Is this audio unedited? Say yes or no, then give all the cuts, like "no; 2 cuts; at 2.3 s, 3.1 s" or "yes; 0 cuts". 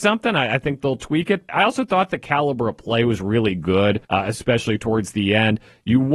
no; 2 cuts; at 1.5 s, 4.0 s